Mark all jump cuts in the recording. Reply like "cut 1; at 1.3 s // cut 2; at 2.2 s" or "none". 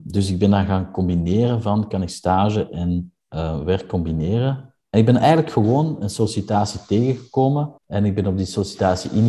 cut 1; at 4.8 s // cut 2; at 7.8 s